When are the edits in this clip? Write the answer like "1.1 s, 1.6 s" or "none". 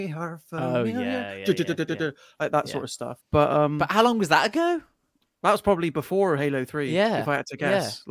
3.2 s